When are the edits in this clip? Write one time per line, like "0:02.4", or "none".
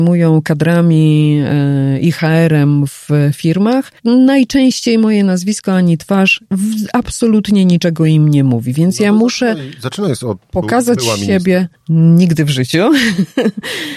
0:04.0
0:06.4
0:11.7